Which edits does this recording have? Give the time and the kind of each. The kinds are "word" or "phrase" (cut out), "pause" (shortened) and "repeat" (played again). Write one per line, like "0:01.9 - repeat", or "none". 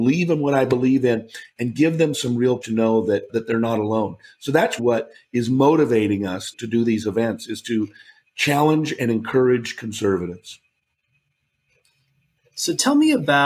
0:02.6 - word
0:03.3 - word
0:04.8 - word
0:06.5 - word